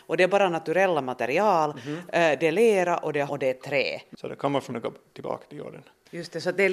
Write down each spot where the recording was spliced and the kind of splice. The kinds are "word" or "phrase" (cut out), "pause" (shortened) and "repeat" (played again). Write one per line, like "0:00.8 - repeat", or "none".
0:03.3 - word
0:04.7 - word